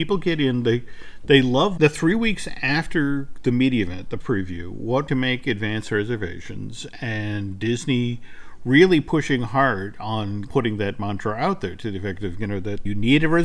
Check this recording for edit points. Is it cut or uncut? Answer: cut